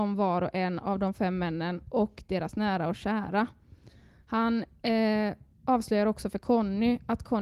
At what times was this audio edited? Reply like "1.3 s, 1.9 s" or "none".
none